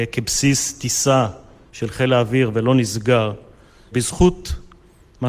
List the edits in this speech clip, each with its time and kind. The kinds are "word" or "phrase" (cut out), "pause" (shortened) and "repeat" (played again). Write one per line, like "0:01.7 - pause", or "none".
none